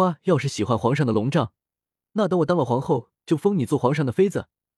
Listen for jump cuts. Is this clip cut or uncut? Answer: uncut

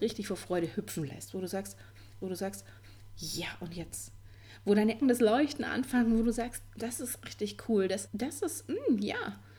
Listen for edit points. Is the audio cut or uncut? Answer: cut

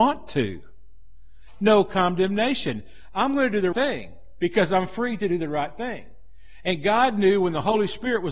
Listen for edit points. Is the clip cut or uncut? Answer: cut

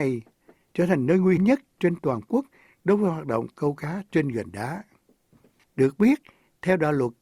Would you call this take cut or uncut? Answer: cut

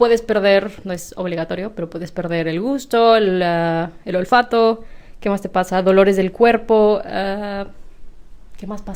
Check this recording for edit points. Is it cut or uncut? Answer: uncut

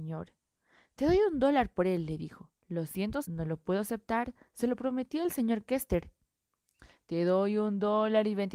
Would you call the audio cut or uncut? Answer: cut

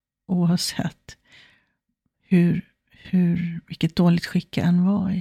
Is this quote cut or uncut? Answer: uncut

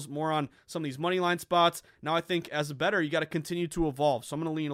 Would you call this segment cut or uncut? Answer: uncut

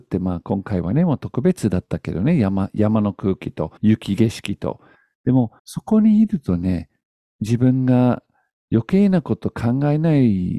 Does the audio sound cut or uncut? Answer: cut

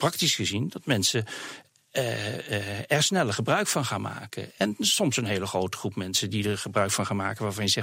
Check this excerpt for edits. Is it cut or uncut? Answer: uncut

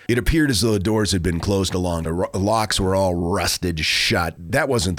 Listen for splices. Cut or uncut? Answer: cut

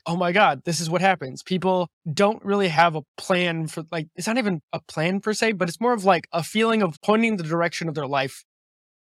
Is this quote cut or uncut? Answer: cut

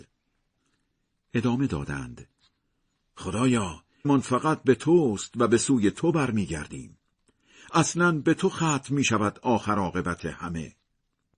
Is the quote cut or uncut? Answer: cut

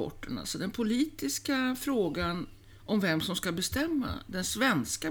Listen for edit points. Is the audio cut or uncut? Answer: uncut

